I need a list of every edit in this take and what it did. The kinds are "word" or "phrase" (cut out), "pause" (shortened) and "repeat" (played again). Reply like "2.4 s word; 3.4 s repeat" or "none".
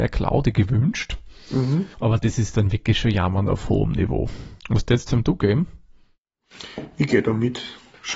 1.9 s pause; 4.6 s pause